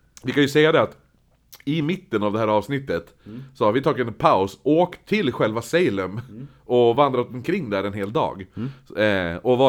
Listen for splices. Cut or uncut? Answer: uncut